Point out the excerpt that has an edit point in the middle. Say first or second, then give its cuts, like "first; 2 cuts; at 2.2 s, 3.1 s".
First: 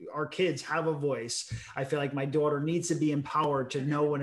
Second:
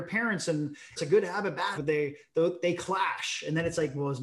second; 2 cuts; at 1.0 s, 1.7 s